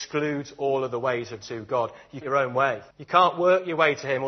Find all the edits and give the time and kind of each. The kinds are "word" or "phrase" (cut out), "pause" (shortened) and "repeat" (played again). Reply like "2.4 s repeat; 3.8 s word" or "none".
1.4 s word; 2.2 s phrase; 2.9 s pause